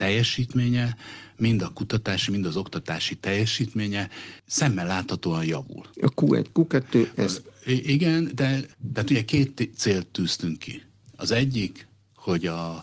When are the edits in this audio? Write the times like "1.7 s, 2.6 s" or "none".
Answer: 5.9 s, 8.7 s

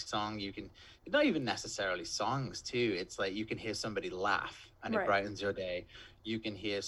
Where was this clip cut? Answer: 1.0 s

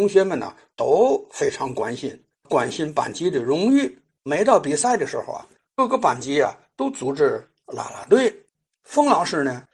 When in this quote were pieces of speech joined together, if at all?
none

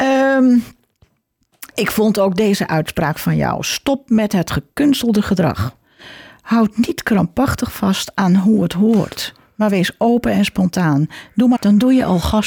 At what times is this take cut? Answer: 11.6 s

